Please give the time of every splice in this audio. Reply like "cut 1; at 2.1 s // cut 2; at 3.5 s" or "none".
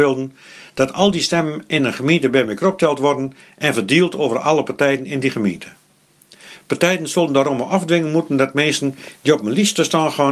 none